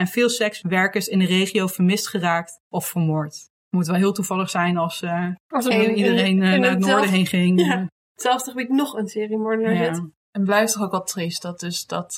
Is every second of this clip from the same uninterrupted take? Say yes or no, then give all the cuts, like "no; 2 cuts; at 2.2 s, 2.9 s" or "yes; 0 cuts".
no; 3 cuts; at 3.6 s, 5.7 s, 10.2 s